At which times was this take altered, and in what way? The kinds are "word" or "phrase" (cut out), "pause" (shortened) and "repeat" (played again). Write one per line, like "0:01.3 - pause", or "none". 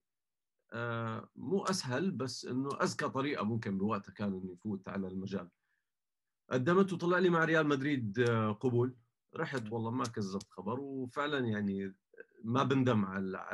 none

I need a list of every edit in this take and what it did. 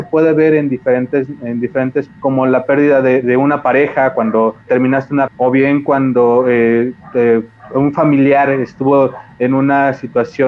0:02.1 - word
0:03.2 - word
0:04.7 - word
0:05.3 - word

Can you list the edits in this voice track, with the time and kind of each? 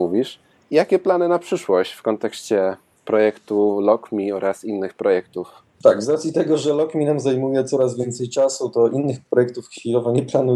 0:03.0 - pause
0:05.7 - pause

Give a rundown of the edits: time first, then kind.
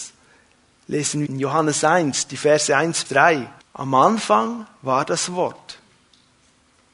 0:01.3 - word
0:03.0 - word
0:03.6 - pause

